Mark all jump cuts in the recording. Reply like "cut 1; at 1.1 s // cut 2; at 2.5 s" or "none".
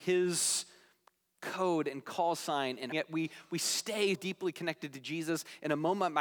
cut 1; at 2.9 s // cut 2; at 4.1 s